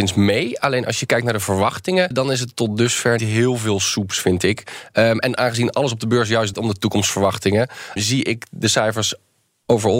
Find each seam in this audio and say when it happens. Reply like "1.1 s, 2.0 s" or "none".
2.1 s, 3.2 s, 6.5 s, 8.0 s